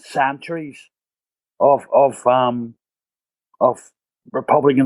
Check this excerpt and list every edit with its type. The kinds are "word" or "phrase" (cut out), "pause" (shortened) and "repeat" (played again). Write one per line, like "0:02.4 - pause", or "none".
none